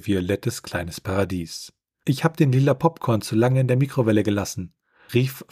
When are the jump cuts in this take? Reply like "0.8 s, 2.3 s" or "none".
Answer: none